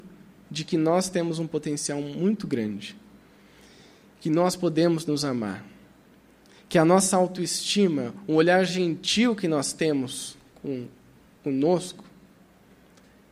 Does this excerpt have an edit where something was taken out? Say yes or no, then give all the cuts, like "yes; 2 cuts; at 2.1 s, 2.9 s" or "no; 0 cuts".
no; 0 cuts